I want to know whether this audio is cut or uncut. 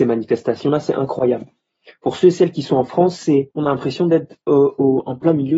cut